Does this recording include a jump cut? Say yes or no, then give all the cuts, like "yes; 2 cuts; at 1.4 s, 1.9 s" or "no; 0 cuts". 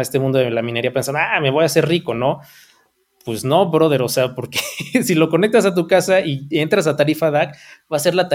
no; 0 cuts